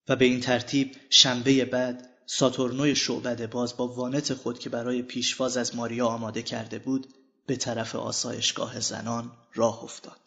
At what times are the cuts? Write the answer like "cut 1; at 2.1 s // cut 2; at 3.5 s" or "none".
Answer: none